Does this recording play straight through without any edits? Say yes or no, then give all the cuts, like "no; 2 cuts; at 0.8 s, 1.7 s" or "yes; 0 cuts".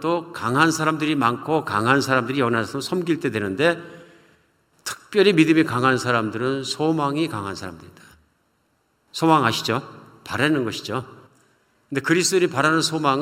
yes; 0 cuts